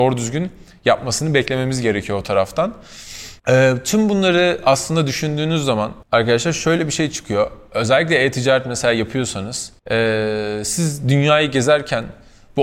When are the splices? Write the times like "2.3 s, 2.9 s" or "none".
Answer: 3.4 s, 6.0 s, 9.8 s